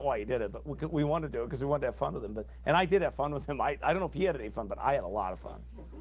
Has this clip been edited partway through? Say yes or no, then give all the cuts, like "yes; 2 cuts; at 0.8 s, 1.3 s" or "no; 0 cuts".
no; 0 cuts